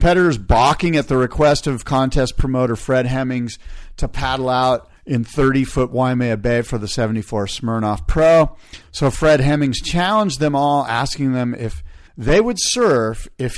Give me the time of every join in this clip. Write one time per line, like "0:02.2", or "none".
0:05.0
0:12.1